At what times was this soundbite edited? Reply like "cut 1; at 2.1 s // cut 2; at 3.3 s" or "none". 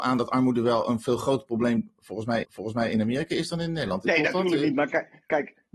cut 1; at 2.4 s